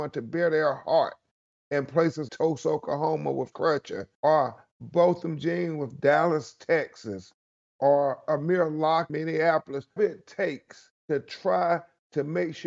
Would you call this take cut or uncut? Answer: cut